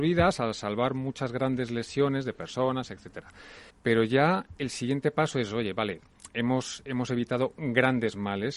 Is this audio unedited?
no; 1 cut; at 3.7 s

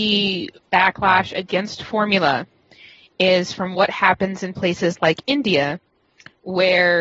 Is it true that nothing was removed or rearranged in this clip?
yes; 0 cuts

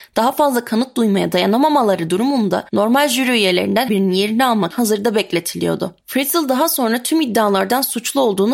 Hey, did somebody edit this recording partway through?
yes; 4 cuts; at 2.7 s, 3.9 s, 4.7 s, 6.0 s

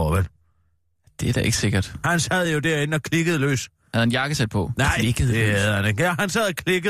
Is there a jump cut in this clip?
no; 0 cuts

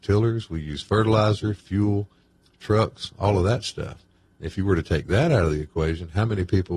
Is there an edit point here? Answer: no; 0 cuts

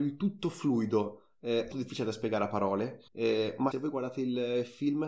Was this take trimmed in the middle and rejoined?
yes; 3 cuts; at 1.7 s, 3.1 s, 3.7 s

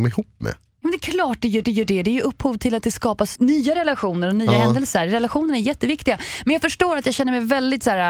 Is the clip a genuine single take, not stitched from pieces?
no; 2 cuts; at 1.6 s, 3.4 s

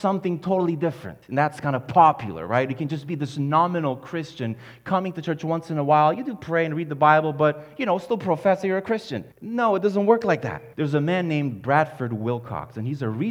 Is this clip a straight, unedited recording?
no; 3 cuts; at 1.2 s, 9.3 s, 10.7 s

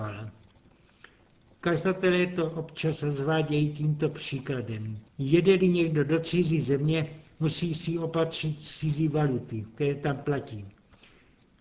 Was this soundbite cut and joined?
yes; 1 cut; at 5.1 s

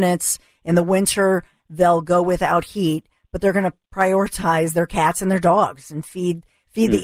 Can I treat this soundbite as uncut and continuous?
yes; 0 cuts

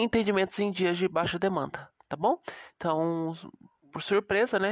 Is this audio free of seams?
yes; 0 cuts

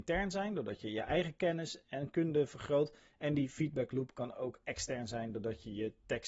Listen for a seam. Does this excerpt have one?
no; 0 cuts

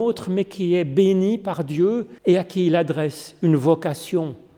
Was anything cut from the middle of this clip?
yes; 1 cut; at 2.2 s

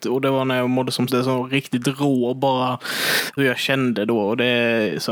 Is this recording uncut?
no; 2 cuts; at 1.1 s, 3.4 s

